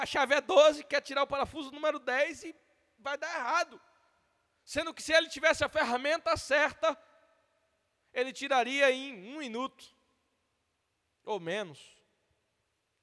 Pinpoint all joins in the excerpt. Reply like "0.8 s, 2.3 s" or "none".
none

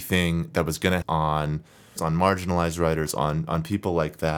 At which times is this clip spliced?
1.0 s, 2.0 s

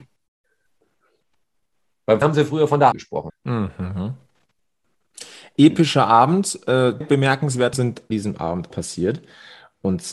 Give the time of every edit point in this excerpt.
2.2 s, 2.9 s, 3.3 s, 7.0 s, 7.7 s, 8.1 s, 8.7 s

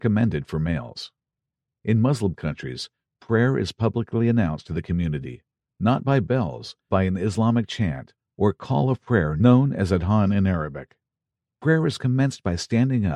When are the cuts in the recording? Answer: 6.9 s

